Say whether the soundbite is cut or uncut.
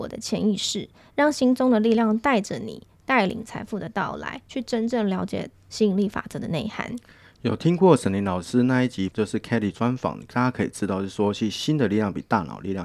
cut